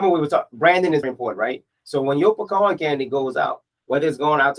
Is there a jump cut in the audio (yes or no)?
yes